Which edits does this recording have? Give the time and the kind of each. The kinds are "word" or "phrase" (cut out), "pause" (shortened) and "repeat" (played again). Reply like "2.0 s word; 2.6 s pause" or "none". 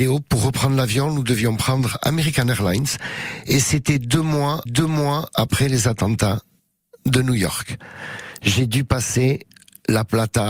4.7 s repeat